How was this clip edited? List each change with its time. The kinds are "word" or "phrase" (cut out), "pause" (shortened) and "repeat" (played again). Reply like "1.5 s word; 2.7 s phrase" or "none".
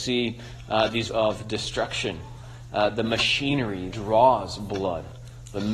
1.1 s word; 3.9 s word